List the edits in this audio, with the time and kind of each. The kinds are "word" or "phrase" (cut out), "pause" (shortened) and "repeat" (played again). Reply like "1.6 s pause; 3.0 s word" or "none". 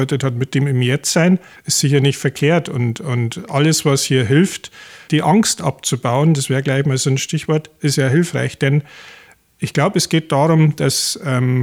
5.1 s word